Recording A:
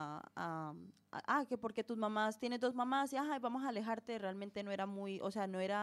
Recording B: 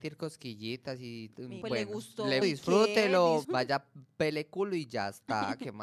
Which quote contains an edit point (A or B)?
B